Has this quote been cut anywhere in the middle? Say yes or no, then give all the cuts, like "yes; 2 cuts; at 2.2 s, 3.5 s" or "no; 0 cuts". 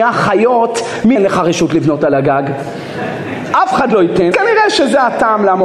yes; 2 cuts; at 1.2 s, 4.3 s